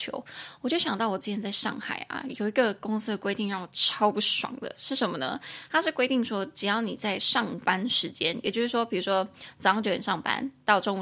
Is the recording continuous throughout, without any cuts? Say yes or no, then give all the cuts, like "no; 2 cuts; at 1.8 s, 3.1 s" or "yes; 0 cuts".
yes; 0 cuts